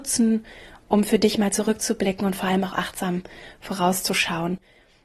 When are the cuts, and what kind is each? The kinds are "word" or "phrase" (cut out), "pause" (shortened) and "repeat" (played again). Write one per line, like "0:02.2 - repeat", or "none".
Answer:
none